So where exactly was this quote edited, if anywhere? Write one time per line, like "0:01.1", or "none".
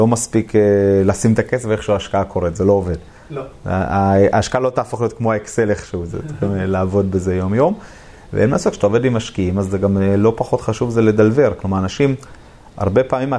none